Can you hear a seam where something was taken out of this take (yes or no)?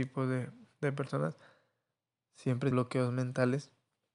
yes